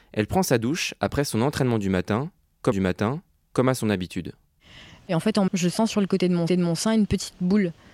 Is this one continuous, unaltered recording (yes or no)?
no